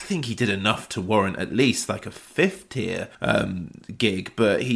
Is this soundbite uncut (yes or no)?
no